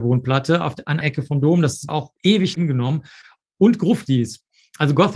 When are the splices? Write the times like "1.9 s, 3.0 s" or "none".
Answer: 1.0 s, 1.9 s, 2.5 s